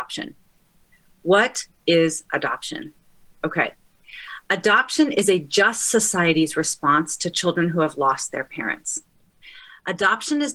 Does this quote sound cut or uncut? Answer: uncut